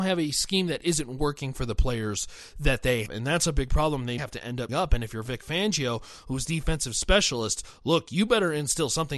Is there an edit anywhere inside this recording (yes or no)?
yes